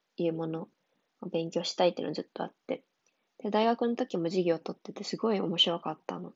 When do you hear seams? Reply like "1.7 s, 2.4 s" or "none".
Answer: none